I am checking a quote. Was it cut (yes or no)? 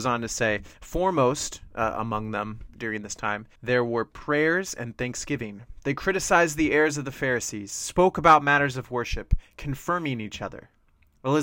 yes